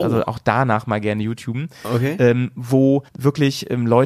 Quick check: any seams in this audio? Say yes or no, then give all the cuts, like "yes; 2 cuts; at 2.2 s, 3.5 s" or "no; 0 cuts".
yes; 1 cut; at 3.1 s